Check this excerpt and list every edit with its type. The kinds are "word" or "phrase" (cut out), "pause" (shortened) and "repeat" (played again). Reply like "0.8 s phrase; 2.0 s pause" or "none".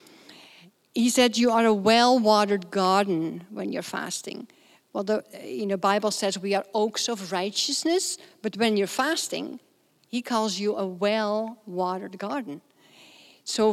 none

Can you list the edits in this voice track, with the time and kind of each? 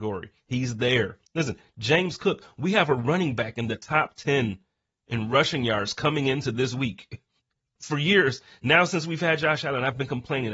1.3 s pause; 7.4 s pause

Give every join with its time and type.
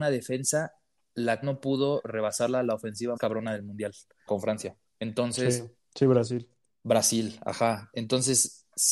1.4 s word; 3.2 s word; 4.3 s word; 4.9 s pause; 5.8 s pause

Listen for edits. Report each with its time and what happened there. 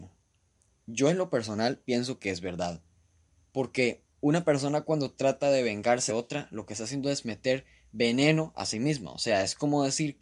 4.1 s pause; 6.1 s word

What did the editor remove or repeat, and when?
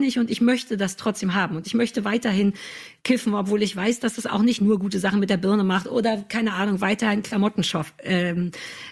3.0 s pause

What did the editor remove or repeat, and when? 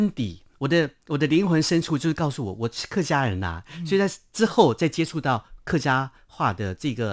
none

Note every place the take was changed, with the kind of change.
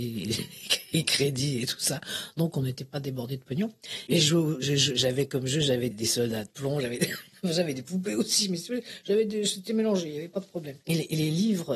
5.9 s word

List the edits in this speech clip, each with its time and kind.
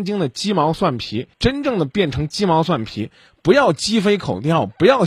1.3 s pause

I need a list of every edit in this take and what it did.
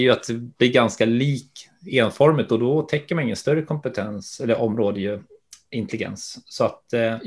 none

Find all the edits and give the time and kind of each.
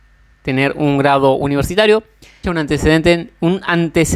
2.4 s word

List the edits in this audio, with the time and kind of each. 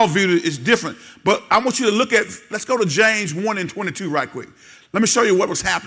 none

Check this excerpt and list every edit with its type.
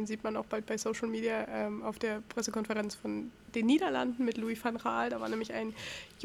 none

